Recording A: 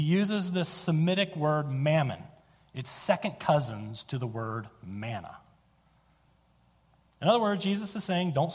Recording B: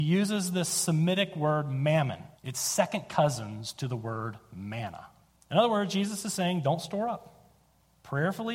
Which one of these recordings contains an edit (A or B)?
B